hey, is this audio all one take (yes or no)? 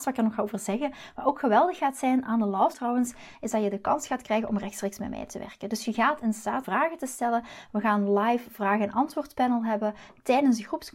no